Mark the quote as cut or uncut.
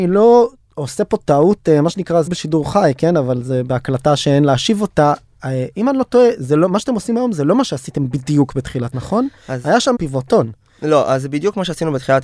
cut